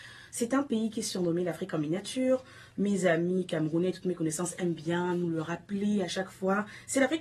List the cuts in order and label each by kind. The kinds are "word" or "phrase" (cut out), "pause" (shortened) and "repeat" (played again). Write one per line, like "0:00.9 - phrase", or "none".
none